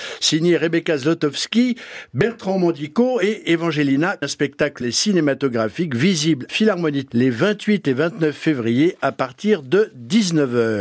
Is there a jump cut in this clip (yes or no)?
yes